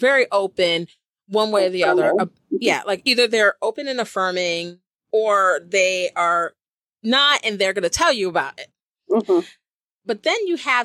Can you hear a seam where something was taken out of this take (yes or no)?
no